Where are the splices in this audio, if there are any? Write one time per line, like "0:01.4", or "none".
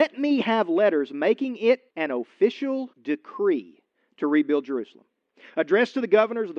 0:01.9
0:02.9